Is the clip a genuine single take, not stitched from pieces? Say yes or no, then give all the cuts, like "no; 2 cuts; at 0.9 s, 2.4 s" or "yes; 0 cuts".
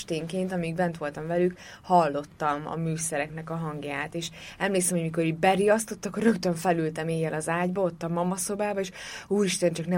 yes; 0 cuts